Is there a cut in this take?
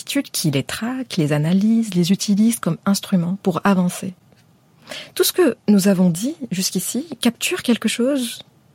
yes; 1 cut; at 5.6 s

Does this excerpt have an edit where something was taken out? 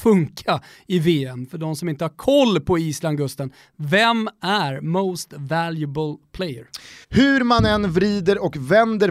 yes; 1 cut; at 7.0 s

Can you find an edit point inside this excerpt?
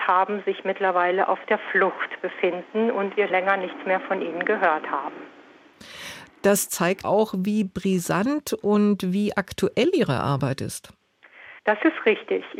yes; 3 cuts; at 3.3 s, 7.0 s, 11.6 s

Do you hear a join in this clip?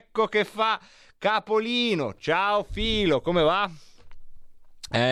no; 0 cuts

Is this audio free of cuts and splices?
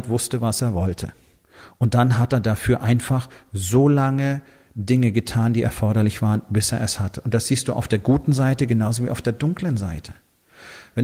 yes; 0 cuts

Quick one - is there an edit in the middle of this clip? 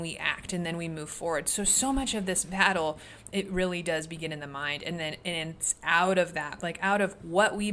no; 0 cuts

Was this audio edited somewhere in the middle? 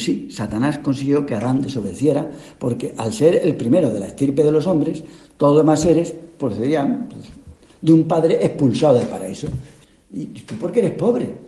no; 0 cuts

